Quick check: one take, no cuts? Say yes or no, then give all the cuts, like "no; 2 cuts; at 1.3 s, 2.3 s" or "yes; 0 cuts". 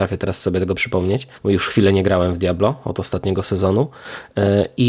no; 1 cut; at 1.4 s